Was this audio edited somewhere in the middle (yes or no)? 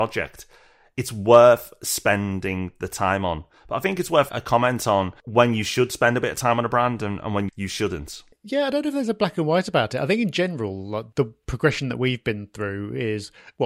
yes